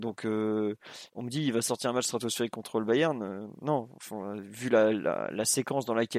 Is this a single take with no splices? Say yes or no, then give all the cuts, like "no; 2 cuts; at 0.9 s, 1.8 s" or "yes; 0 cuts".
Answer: no; 1 cut; at 1.1 s